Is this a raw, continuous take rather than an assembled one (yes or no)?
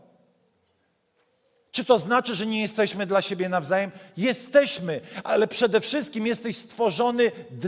yes